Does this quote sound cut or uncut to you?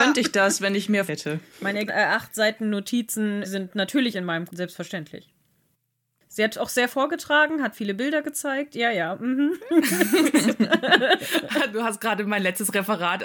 cut